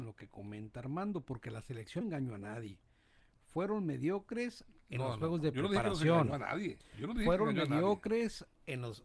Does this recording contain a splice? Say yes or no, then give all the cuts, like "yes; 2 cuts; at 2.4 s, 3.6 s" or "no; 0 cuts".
yes; 1 cut; at 2.0 s